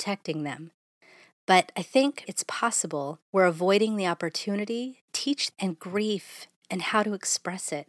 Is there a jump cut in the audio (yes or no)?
yes